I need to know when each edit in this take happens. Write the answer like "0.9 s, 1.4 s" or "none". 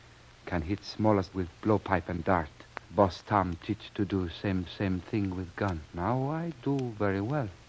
1.3 s, 2.8 s, 4.7 s, 5.9 s